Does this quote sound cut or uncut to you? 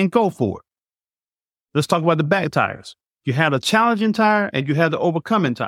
cut